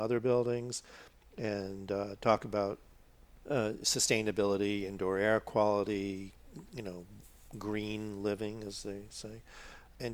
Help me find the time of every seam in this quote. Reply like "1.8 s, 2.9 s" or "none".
none